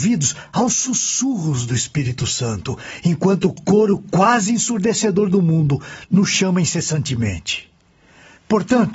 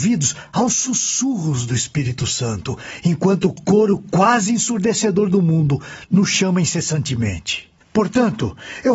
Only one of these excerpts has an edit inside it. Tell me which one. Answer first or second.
second